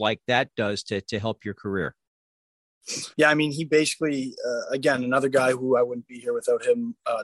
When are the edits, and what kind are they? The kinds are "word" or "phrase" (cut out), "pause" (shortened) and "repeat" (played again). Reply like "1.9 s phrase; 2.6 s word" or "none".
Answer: 3.1 s pause